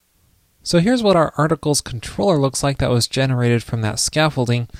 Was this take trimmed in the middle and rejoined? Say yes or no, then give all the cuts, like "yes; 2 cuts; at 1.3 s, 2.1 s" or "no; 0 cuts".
no; 0 cuts